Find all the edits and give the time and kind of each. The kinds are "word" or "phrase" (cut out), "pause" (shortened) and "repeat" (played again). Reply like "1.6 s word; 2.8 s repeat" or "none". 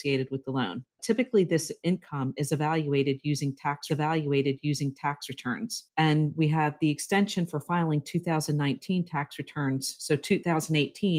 3.9 s repeat